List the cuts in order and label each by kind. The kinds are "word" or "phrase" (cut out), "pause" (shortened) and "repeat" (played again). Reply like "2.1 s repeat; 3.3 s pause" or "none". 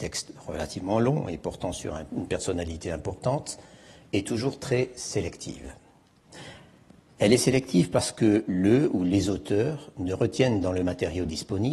none